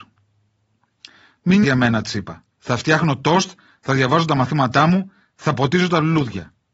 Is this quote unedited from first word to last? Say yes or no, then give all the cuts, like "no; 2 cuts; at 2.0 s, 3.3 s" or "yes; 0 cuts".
no; 2 cuts; at 1.6 s, 2.5 s